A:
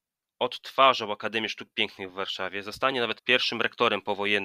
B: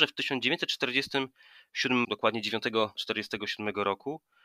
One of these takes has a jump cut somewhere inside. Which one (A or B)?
B